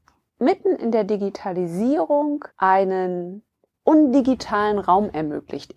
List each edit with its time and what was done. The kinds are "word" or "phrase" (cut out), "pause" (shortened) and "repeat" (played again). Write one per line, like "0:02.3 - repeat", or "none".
0:02.5 - pause